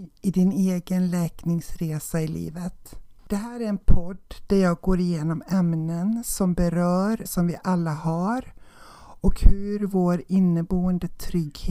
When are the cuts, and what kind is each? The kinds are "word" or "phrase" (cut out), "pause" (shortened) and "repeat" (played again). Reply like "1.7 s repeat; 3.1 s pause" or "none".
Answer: 3.2 s pause; 7.3 s word